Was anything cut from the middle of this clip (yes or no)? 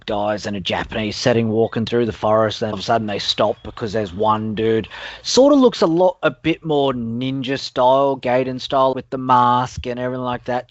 yes